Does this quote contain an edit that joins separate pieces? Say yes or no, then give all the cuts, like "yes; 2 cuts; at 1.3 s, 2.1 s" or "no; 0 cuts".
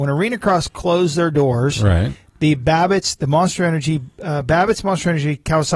no; 0 cuts